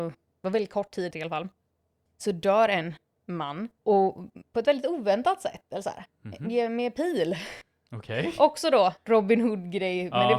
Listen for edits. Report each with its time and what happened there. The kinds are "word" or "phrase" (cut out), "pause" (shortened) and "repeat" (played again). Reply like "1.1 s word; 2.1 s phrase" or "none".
1.1 s word; 3.8 s pause